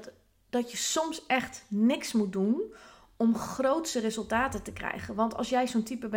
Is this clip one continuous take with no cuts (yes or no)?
yes